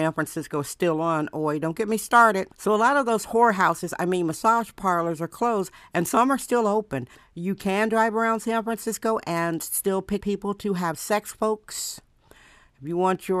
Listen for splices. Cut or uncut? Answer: cut